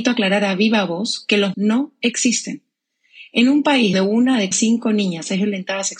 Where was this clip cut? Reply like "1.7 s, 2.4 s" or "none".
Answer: 1.5 s, 3.9 s, 4.5 s